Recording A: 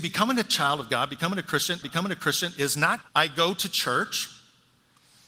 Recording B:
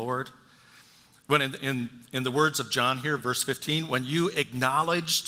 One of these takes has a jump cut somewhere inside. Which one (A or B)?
A